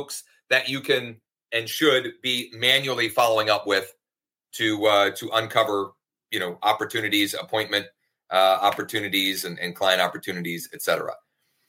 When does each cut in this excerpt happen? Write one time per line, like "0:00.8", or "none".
none